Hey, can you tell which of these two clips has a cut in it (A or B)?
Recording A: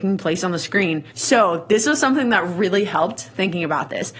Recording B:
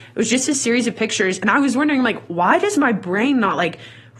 A